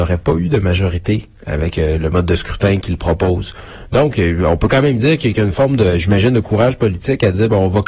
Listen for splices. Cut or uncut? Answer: uncut